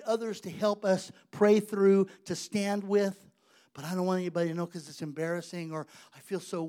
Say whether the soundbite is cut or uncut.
uncut